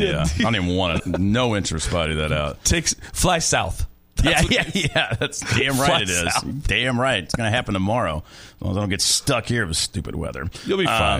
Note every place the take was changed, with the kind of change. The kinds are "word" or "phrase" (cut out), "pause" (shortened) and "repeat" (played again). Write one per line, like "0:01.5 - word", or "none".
0:01.0 - word
0:04.5 - word